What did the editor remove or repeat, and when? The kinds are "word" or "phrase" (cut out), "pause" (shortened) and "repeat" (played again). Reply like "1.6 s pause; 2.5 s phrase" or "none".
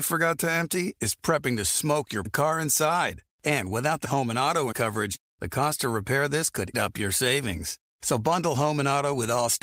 2.2 s phrase; 3.3 s pause; 4.0 s word; 4.7 s word; 6.7 s word